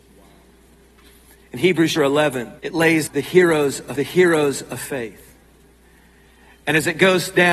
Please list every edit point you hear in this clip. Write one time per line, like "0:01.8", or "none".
0:02.0
0:02.6
0:03.1
0:04.0

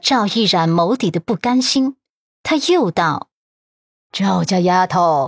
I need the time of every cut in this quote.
none

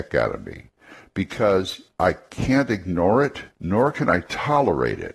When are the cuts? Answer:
0:01.9
0:03.5

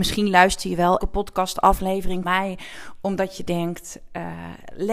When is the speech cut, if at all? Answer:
0:01.0
0:02.2

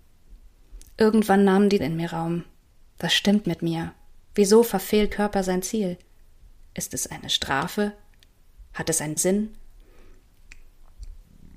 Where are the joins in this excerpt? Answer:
0:01.8
0:03.4
0:05.1
0:09.2

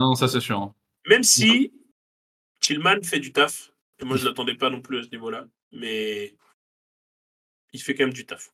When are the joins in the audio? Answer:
none

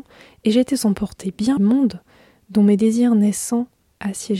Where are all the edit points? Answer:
0:01.6

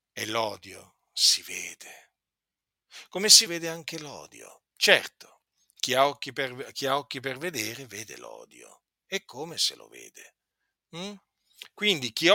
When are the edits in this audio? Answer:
0:03.5
0:04.7

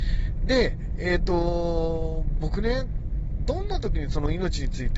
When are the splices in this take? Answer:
none

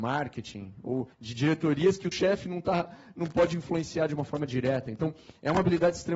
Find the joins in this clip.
0:01.1
0:02.1

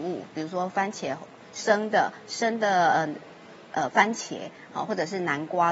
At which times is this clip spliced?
none

